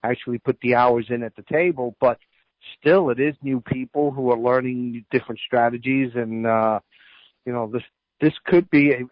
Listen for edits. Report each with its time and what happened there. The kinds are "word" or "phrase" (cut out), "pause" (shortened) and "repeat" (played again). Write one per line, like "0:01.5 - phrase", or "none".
none